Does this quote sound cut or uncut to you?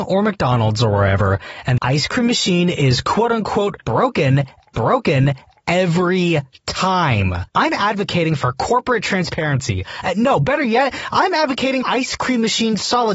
cut